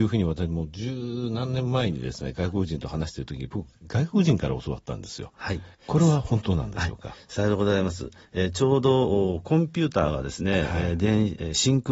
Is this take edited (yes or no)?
yes